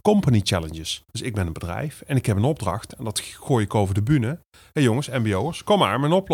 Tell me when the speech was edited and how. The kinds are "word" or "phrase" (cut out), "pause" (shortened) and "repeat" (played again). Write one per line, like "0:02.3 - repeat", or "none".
0:01.1 - pause